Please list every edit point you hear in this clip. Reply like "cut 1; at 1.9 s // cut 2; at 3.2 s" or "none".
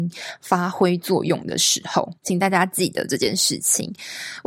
cut 1; at 2.2 s